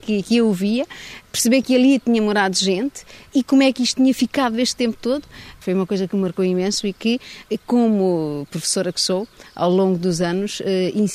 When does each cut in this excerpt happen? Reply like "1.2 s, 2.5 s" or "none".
none